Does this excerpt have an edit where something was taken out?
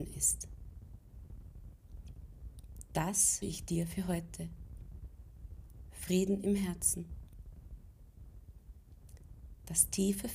yes; 1 cut; at 3.4 s

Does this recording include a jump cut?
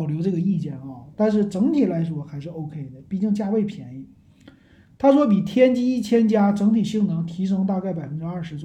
no; 0 cuts

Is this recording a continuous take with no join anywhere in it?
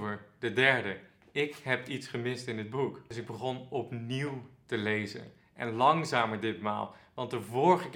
yes; 0 cuts

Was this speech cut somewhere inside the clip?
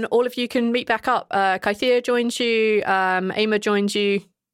no; 0 cuts

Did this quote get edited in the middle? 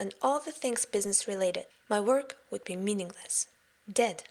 no; 0 cuts

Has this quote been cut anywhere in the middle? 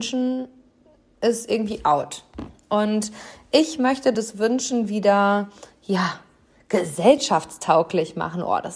no; 0 cuts

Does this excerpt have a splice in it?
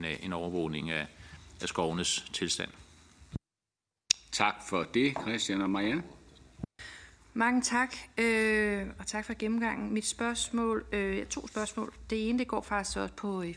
no; 0 cuts

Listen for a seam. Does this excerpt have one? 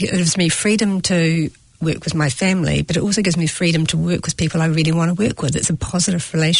no; 0 cuts

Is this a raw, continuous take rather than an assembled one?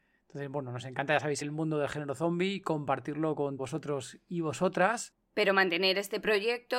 no; 2 cuts; at 1.4 s, 3.6 s

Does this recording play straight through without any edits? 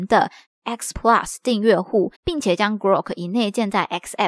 no; 2 cuts; at 0.9 s, 2.1 s

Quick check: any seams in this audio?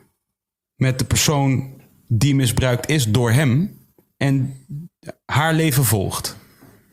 no; 0 cuts

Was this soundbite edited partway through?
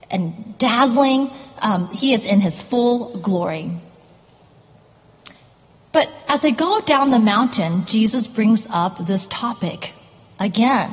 no; 0 cuts

